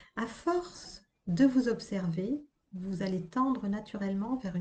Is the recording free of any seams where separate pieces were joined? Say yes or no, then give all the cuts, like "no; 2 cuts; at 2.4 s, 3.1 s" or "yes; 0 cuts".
yes; 0 cuts